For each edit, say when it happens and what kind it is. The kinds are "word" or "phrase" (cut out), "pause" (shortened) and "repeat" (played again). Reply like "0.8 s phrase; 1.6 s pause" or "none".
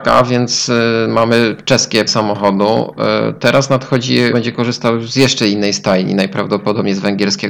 2.1 s word; 4.3 s phrase